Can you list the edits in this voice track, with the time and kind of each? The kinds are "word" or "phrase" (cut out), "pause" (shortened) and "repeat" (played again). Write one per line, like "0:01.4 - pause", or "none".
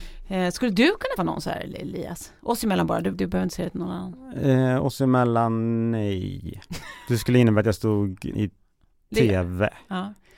0:01.2 - word
0:03.1 - word
0:08.3 - word